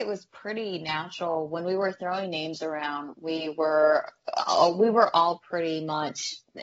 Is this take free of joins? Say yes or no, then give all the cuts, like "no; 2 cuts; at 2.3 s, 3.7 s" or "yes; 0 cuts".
yes; 0 cuts